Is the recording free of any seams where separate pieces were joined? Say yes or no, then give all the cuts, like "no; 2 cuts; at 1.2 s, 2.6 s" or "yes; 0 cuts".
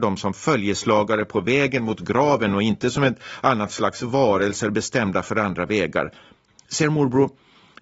yes; 0 cuts